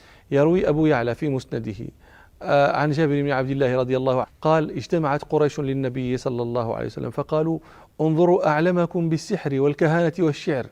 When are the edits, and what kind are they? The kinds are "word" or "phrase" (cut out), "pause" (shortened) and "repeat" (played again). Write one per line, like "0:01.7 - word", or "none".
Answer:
0:04.2 - word